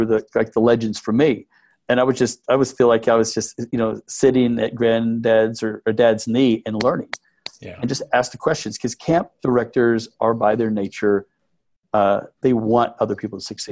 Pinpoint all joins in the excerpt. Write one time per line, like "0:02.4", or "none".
none